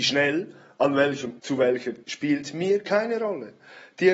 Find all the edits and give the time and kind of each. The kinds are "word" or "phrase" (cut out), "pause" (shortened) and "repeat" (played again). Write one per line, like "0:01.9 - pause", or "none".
0:01.4 - word
0:02.0 - word